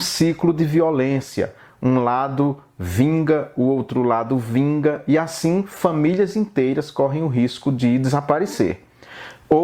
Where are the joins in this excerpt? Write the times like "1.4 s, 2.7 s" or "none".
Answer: none

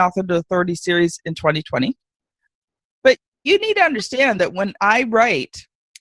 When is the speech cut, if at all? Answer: none

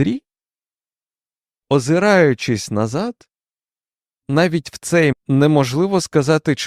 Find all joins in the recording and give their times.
5.1 s

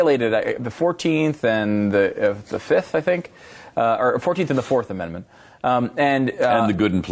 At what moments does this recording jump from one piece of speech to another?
none

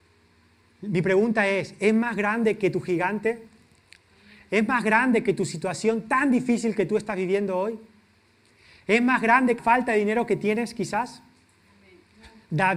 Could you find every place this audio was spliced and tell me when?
9.6 s

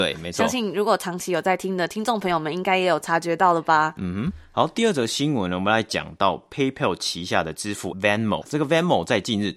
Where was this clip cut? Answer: 7.9 s, 8.4 s

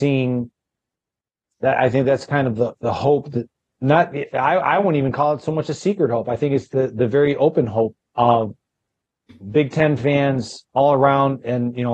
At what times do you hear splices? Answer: 8.0 s

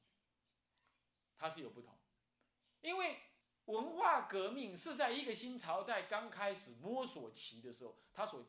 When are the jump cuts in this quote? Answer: 3.4 s

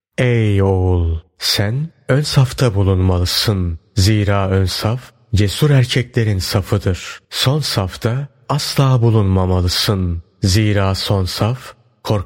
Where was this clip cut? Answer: 1.3 s, 7.2 s

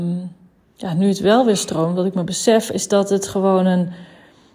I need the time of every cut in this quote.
none

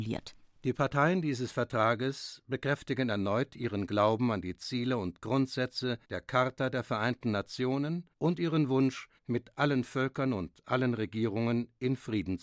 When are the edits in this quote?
6.0 s, 8.1 s, 9.2 s

